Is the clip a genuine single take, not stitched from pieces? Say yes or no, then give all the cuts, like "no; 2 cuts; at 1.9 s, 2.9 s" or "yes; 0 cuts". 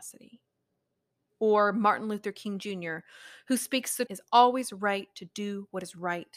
no; 1 cut; at 4.1 s